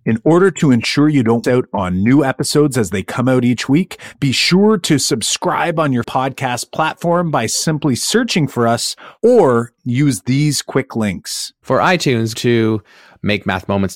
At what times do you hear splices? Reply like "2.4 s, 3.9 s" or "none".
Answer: 1.4 s, 6.0 s, 12.4 s